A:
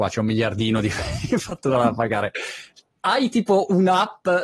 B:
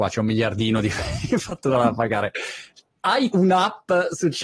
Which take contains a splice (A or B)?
B